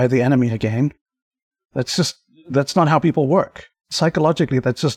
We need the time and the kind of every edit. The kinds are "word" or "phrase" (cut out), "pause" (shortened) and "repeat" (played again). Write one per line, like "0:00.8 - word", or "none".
none